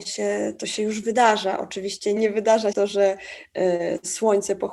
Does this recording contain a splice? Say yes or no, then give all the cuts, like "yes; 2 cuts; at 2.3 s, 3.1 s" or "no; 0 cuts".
yes; 2 cuts; at 2.2 s, 2.7 s